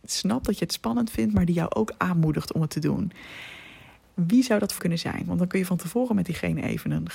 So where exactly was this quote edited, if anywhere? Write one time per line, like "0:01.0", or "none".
0:04.8